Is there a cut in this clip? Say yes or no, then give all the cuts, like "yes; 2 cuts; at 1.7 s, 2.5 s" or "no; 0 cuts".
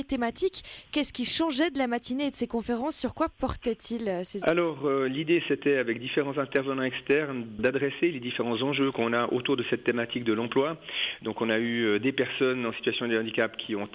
yes; 1 cut; at 4.4 s